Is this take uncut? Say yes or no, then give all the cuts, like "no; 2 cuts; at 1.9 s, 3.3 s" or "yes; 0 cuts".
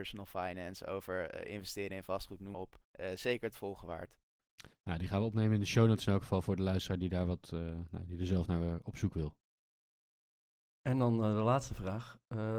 no; 1 cut; at 2.5 s